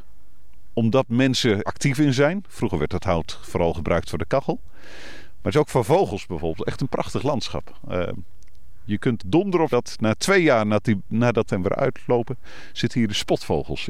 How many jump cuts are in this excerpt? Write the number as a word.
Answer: four